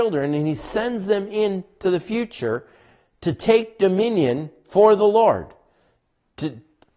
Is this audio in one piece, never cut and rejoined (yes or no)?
yes